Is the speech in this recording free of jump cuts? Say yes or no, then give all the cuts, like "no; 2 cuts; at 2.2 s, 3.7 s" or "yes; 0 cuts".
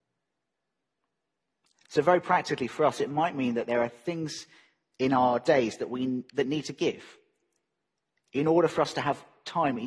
yes; 0 cuts